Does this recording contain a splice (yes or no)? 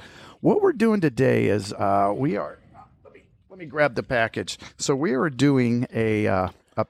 no